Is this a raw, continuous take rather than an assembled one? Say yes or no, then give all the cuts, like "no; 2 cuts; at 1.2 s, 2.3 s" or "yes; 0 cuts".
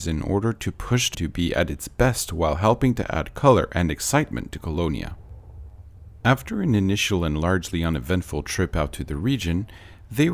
no; 1 cut; at 1.1 s